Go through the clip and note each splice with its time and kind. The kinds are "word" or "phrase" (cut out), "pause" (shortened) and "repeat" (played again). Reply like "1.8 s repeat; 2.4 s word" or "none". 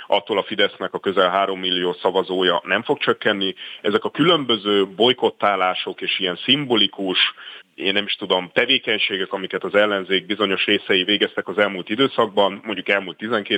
7.6 s word

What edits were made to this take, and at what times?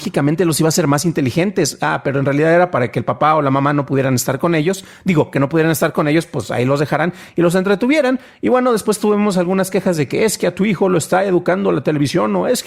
none

